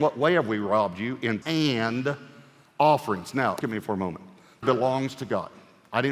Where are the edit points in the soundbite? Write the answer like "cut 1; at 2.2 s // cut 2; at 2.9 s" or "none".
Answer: cut 1; at 1.4 s // cut 2; at 3.6 s // cut 3; at 4.6 s